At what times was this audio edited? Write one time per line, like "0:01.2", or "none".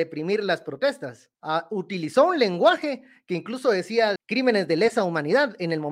0:01.3
0:04.2